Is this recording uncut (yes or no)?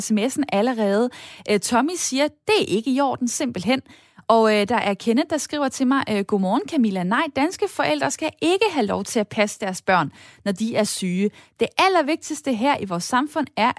yes